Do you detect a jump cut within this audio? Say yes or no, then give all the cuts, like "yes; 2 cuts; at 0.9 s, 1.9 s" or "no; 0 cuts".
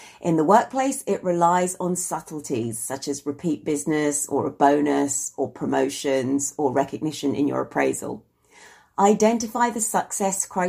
no; 0 cuts